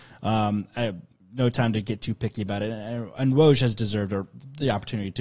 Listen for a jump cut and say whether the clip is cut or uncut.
uncut